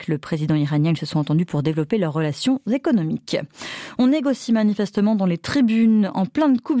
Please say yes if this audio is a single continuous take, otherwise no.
yes